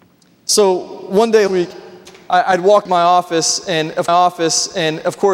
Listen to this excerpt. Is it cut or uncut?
cut